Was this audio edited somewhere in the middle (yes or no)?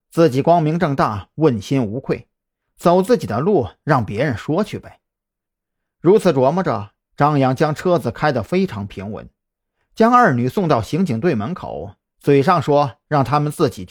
no